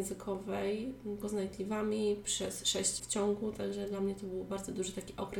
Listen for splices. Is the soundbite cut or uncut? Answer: cut